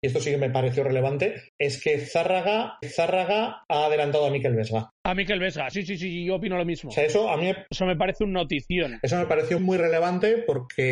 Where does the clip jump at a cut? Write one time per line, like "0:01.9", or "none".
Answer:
0:01.5
0:02.8
0:04.9
0:05.7
0:09.6